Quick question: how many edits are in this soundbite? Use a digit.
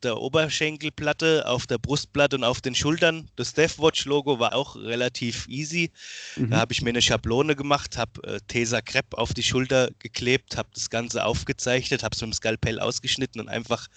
1